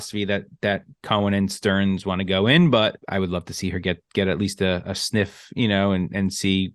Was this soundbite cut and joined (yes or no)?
yes